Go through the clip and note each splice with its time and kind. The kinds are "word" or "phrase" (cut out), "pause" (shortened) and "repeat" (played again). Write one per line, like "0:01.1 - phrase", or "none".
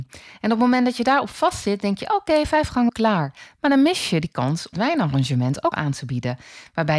0:02.9 - word
0:04.7 - word
0:05.7 - word